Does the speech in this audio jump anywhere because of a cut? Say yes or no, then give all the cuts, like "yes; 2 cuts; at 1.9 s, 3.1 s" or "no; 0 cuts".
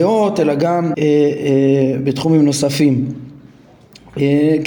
yes; 1 cut; at 0.9 s